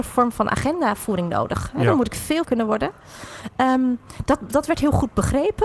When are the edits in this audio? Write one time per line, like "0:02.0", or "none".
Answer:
0:02.4